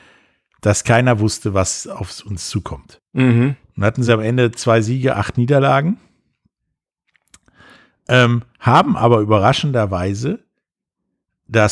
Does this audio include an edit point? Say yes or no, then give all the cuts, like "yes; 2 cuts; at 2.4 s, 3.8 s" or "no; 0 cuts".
no; 0 cuts